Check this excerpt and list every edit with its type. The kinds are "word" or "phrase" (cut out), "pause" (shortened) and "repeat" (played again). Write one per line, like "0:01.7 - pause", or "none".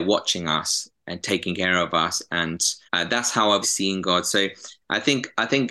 0:02.8 - pause
0:03.6 - word